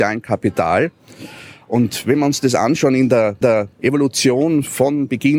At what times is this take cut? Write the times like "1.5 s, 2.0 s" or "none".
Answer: 3.4 s